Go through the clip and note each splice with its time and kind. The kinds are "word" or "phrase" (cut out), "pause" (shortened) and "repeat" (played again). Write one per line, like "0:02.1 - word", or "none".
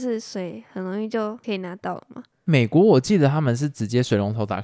0:02.3 - pause